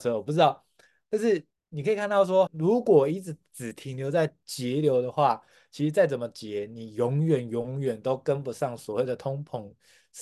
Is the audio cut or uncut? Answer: cut